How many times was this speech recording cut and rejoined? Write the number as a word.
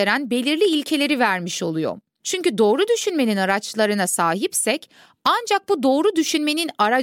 zero